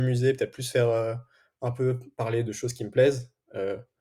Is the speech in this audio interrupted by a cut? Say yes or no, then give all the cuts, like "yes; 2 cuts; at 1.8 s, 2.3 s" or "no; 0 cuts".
yes; 1 cut; at 2.4 s